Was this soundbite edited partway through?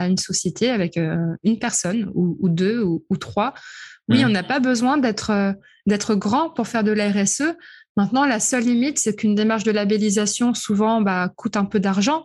no; 0 cuts

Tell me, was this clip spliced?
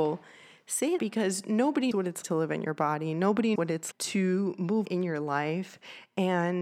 yes; 6 cuts; at 1.0 s, 1.9 s, 2.2 s, 3.5 s, 3.9 s, 4.8 s

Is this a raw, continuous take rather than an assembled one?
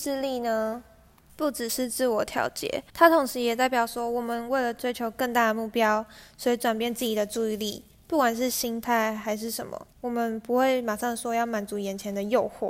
no; 2 cuts; at 2.9 s, 9.9 s

